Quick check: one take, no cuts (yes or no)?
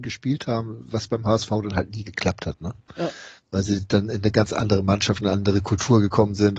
yes